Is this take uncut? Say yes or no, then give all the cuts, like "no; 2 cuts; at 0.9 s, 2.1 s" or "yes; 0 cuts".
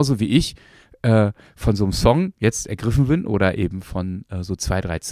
yes; 0 cuts